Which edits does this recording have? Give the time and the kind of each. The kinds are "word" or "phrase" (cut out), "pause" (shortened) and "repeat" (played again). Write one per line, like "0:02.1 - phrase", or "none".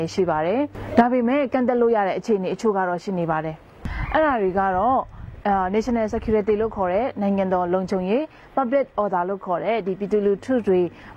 none